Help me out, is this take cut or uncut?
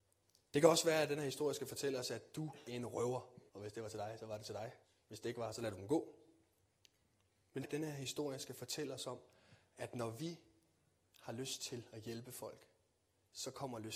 cut